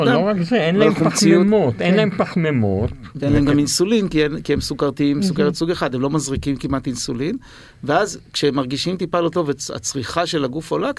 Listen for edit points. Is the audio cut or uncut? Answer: uncut